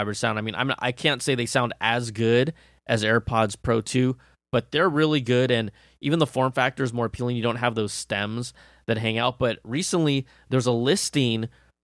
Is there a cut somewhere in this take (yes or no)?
no